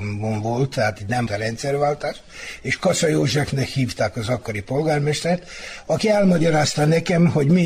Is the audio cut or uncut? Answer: cut